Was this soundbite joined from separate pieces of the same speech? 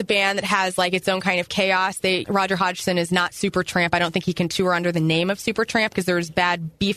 yes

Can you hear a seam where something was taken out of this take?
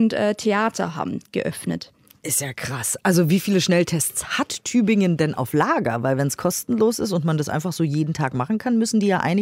no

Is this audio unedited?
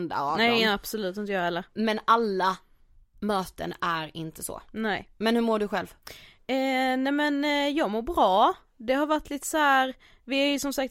yes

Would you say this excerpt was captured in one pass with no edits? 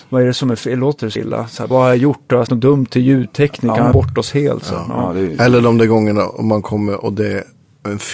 no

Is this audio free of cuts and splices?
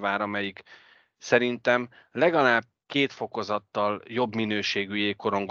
yes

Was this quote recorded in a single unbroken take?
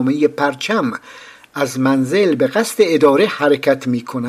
yes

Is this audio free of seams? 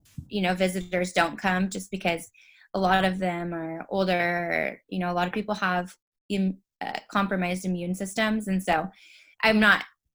yes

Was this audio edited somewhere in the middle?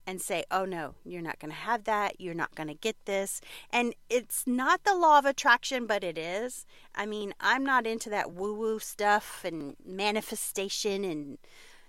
no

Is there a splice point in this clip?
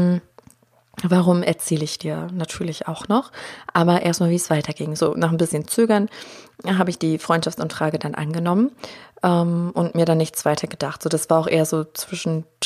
no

